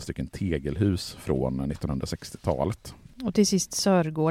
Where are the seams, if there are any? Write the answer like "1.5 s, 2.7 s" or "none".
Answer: none

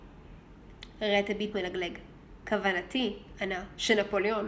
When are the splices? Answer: 1.5 s

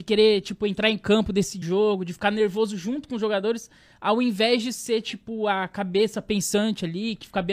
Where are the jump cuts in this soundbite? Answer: 1.6 s

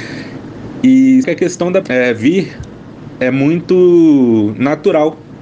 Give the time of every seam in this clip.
1.2 s, 1.8 s

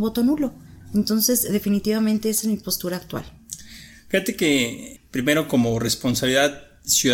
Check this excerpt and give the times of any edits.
5.0 s

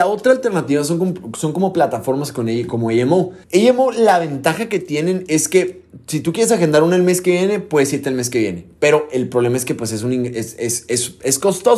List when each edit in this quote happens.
3.4 s

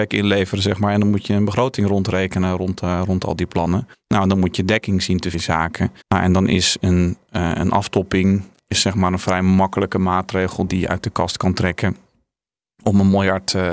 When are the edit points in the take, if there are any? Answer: 3.9 s, 5.3 s, 6.0 s, 8.5 s

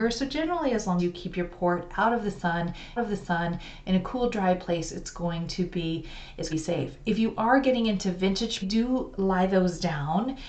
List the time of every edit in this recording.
1.0 s, 3.0 s, 6.5 s, 8.6 s

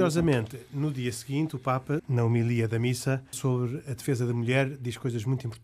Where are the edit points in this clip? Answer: 2.0 s, 3.3 s

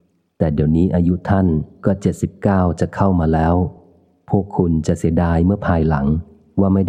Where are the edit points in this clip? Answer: none

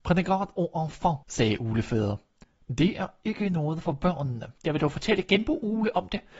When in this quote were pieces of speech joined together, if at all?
1.2 s, 4.6 s

